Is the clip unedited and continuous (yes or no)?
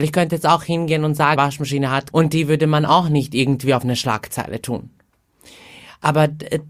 no